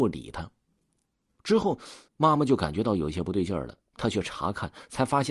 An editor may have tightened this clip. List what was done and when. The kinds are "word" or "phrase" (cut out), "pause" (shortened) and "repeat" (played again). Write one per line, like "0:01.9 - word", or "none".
0:02.1 - pause

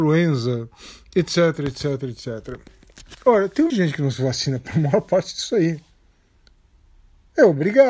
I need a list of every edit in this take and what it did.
0:03.7 - word

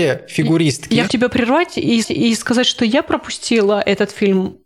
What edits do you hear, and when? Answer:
0:01.1 - word
0:02.0 - repeat

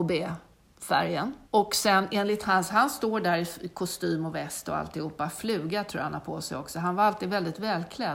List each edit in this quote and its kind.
0:01.4 - pause

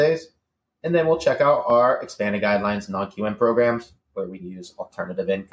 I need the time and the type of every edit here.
0:04.4 - word

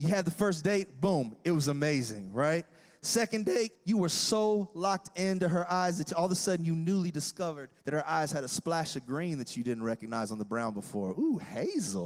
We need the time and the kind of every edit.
0:03.7 - pause
0:07.8 - pause

